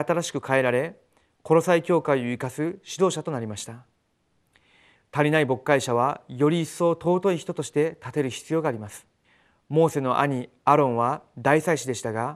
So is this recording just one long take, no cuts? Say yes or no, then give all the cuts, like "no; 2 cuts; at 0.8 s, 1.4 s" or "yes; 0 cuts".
no; 1 cut; at 9.2 s